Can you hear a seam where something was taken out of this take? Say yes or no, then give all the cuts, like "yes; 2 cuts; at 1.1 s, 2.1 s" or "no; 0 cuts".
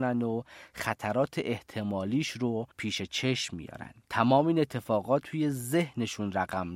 yes; 3 cuts; at 2.7 s, 4.0 s, 5.2 s